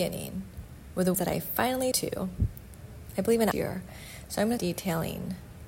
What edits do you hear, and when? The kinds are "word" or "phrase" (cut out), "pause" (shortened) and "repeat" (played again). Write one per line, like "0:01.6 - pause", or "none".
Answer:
0:01.1 - word
0:01.9 - word
0:03.5 - phrase
0:04.6 - word